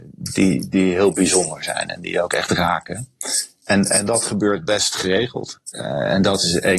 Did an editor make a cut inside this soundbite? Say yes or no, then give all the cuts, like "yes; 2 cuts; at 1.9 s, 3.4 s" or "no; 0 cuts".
no; 0 cuts